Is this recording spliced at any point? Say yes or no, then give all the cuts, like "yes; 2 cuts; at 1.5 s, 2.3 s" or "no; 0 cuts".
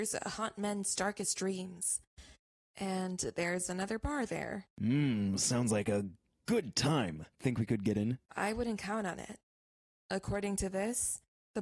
yes; 3 cuts; at 4.7 s, 7.3 s, 8.3 s